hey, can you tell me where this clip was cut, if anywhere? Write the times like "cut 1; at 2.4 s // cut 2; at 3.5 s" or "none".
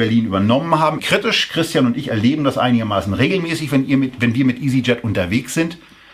cut 1; at 1.0 s